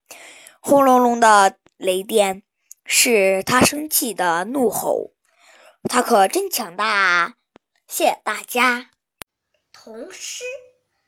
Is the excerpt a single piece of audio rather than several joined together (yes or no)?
yes